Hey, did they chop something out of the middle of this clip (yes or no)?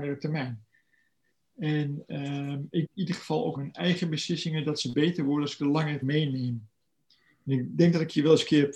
yes